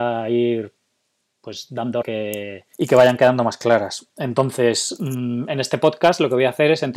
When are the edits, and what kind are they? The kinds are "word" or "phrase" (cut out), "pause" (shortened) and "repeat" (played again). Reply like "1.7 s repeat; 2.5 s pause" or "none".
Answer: 2.0 s phrase; 2.7 s pause